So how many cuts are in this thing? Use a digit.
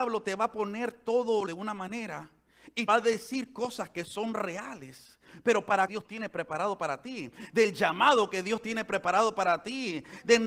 3